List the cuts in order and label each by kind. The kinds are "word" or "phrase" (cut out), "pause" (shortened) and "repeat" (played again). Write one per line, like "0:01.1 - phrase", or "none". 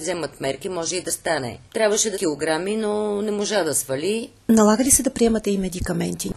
0:01.7 - pause
0:02.1 - word